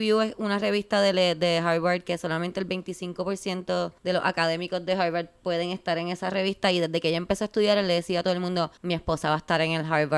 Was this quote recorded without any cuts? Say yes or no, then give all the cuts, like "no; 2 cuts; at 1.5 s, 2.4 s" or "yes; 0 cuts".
no; 2 cuts; at 4.0 s, 8.8 s